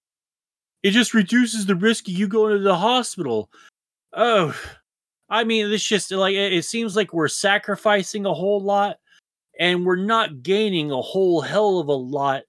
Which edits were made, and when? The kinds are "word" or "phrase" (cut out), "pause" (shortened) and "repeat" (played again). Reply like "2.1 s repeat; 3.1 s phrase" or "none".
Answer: none